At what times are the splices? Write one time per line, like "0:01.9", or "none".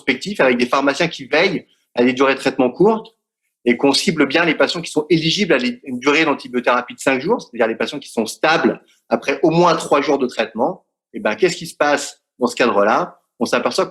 none